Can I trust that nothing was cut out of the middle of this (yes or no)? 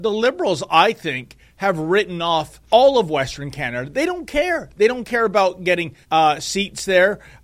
no